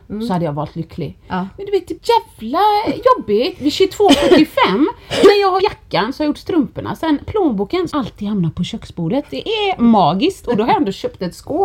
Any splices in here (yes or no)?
yes